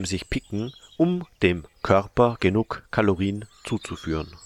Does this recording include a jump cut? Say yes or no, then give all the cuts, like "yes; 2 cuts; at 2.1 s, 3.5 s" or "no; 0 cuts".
no; 0 cuts